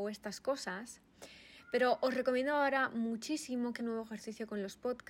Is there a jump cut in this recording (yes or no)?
yes